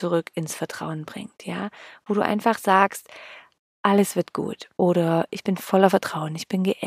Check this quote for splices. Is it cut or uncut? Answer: uncut